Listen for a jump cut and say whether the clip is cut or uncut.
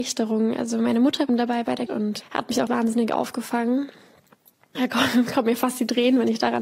cut